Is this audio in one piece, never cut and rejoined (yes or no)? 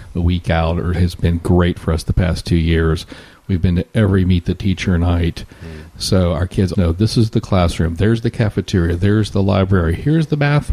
no